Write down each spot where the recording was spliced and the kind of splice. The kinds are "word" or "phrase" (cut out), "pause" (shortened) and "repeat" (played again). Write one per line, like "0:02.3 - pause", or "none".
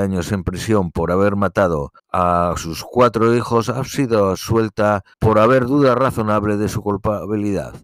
0:02.0 - pause
0:05.1 - pause